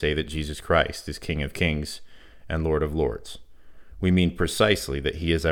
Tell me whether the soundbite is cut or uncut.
uncut